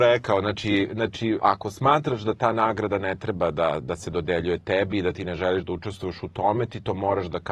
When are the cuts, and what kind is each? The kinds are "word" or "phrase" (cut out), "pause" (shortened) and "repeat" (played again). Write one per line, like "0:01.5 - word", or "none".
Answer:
0:01.4 - word